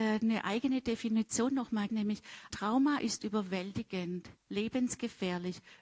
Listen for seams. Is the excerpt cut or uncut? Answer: cut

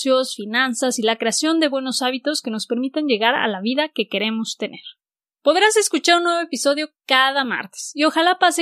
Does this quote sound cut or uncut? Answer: uncut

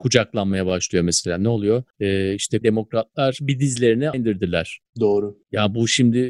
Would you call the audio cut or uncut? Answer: cut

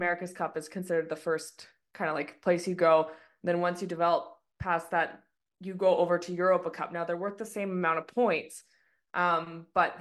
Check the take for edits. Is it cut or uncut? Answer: uncut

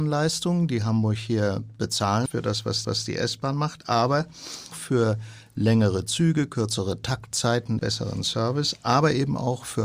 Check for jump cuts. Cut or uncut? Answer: cut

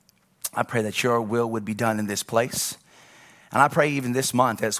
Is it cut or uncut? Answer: uncut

